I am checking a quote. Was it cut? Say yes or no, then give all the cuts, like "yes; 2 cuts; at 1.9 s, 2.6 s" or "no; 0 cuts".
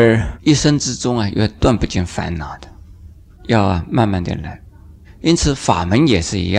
no; 0 cuts